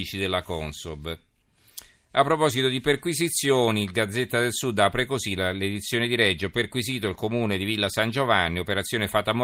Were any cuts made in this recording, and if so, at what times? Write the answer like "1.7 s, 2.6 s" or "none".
none